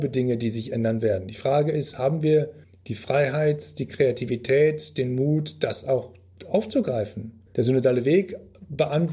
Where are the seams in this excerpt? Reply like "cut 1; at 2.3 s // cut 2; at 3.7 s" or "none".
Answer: cut 1; at 2.6 s // cut 2; at 7.5 s